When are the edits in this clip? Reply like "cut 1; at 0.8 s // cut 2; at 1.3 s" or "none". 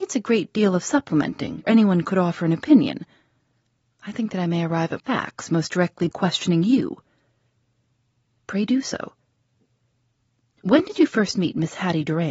cut 1; at 1.6 s // cut 2; at 5.0 s // cut 3; at 6.1 s

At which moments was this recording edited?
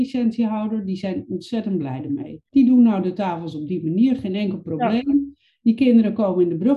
cut 1; at 2.5 s

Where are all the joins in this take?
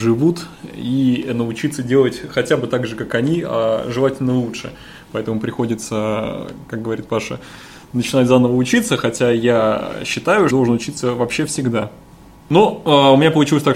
cut 1; at 10.5 s

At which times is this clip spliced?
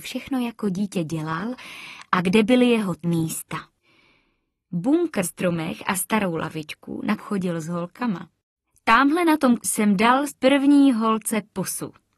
cut 1; at 3.0 s // cut 2; at 5.2 s // cut 3; at 7.2 s // cut 4; at 8.6 s // cut 5; at 9.6 s // cut 6; at 10.3 s

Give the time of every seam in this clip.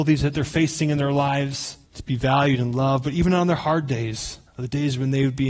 cut 1; at 1.8 s // cut 2; at 4.5 s

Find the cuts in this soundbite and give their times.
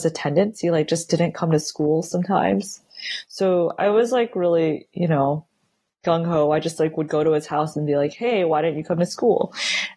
none

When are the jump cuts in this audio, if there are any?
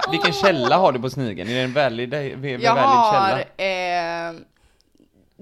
none

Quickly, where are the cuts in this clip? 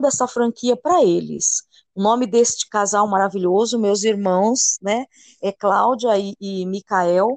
none

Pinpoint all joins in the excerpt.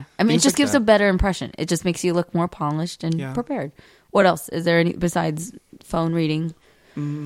none

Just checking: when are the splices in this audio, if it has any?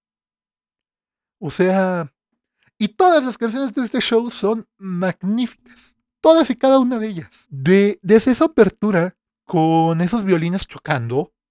cut 1; at 7.4 s

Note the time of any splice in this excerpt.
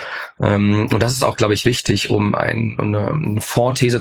none

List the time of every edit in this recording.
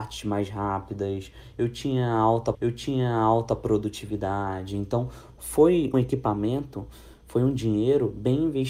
cut 1; at 2.5 s // cut 2; at 5.9 s

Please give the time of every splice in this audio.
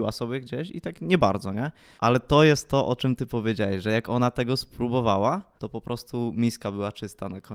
cut 1; at 2.0 s // cut 2; at 5.6 s

